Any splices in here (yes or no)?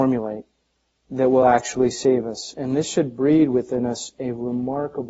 no